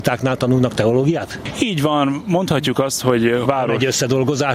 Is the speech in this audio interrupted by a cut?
yes; 1 cut; at 3.5 s

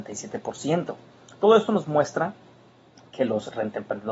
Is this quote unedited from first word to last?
yes; 0 cuts

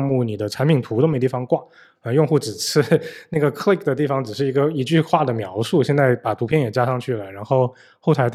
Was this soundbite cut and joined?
no; 0 cuts

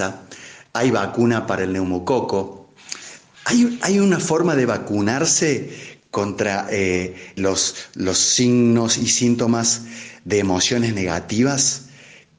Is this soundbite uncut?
no; 1 cut; at 7.4 s

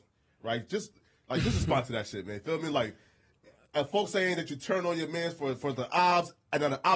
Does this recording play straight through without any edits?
yes; 0 cuts

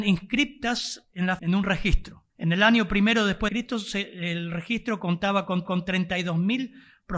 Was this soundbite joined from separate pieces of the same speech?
yes; 4 cuts; at 1.4 s, 2.3 s, 3.5 s, 5.6 s

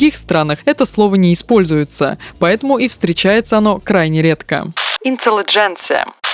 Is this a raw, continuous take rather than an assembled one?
yes; 0 cuts

